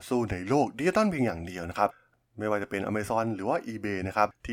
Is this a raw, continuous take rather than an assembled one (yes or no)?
yes